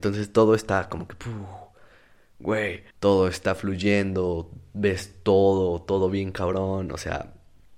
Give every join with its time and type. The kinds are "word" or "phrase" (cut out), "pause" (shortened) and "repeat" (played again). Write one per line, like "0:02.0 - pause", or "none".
0:02.9 - pause